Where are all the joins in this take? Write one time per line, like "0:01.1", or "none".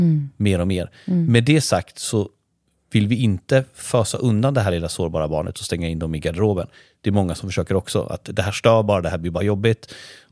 none